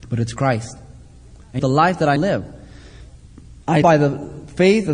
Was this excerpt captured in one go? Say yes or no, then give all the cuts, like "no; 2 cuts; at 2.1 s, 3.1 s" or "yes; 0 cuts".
no; 3 cuts; at 1.6 s, 2.2 s, 3.8 s